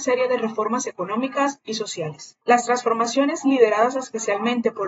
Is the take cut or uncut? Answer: cut